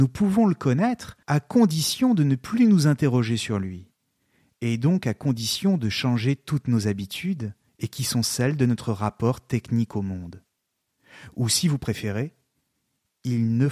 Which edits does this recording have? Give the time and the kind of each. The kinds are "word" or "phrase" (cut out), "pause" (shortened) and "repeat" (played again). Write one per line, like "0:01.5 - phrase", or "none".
0:01.2 - pause
0:07.7 - pause

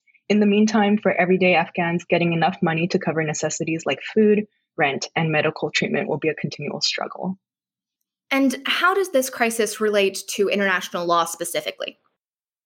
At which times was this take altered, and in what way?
none

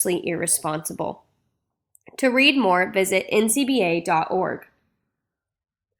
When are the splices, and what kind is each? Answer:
none

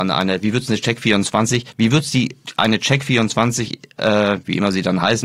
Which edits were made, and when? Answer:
none

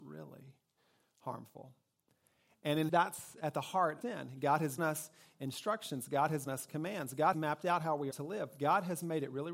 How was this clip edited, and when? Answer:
0:02.9 - word
0:04.0 - word
0:04.8 - word
0:06.5 - word
0:07.3 - word
0:08.1 - word

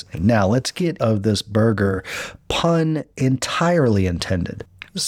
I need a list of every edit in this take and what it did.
0:01.0 - phrase
0:03.1 - pause

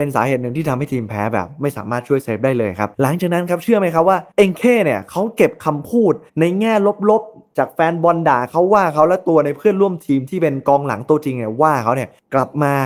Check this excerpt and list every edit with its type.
0:02.9 - pause
0:04.3 - pause
0:06.3 - pause

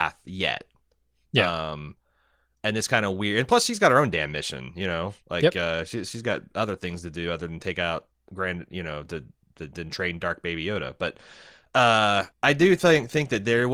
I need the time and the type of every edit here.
0:12.3 - pause

